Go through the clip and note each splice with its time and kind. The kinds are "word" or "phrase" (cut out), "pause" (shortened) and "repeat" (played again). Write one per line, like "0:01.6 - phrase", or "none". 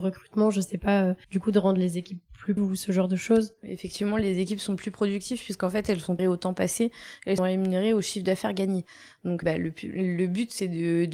0:01.2 - pause
0:02.6 - word
0:06.2 - word
0:07.4 - word
0:09.4 - word